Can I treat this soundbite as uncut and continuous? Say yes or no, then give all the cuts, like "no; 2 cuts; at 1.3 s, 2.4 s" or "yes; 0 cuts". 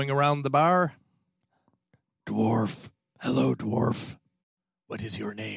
yes; 0 cuts